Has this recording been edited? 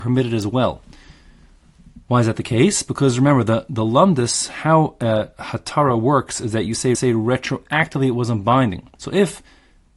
yes; 2 cuts; at 6.9 s, 8.9 s

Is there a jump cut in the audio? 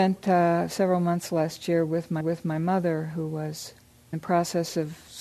yes; 2 cuts; at 2.2 s, 4.1 s

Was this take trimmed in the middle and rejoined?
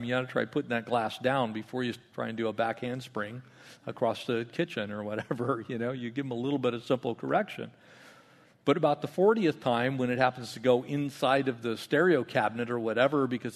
no; 0 cuts

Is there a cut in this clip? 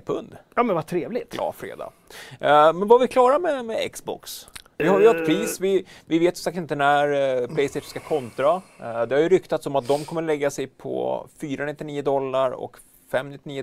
no; 0 cuts

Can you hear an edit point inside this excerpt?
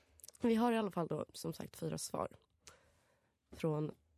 no; 0 cuts

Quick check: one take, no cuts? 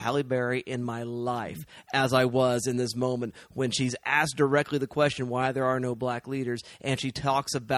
yes; 0 cuts

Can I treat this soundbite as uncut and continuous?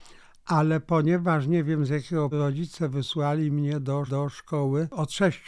no; 2 cuts; at 2.3 s, 4.1 s

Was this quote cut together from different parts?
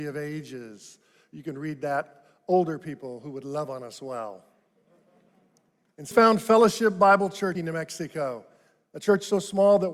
yes; 2 cuts; at 6.1 s, 7.5 s

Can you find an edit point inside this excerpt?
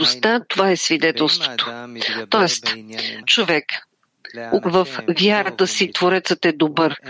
yes; 3 cuts; at 3.2 s, 4.6 s, 5.9 s

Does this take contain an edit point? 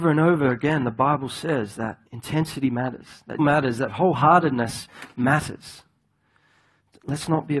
yes; 2 cuts; at 2.1 s, 3.4 s

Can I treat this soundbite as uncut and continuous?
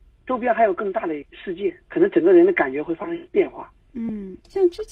no; 1 cut; at 1.8 s

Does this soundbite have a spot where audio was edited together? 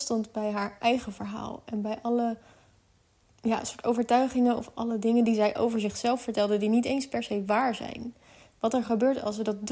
no; 0 cuts

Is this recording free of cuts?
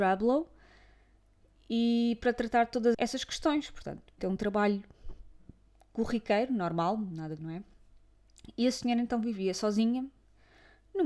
no; 3 cuts; at 2.9 s, 4.2 s, 7.4 s

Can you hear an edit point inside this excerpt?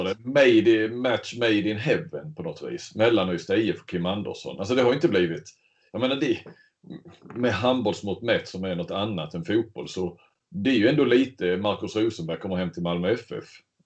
no; 0 cuts

